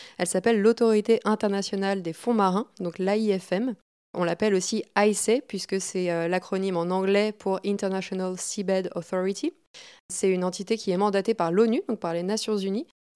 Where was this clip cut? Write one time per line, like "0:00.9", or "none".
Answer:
none